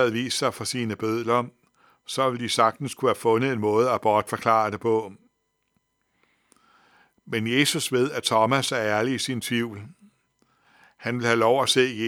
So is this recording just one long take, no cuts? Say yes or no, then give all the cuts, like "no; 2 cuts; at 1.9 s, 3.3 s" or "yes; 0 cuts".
yes; 0 cuts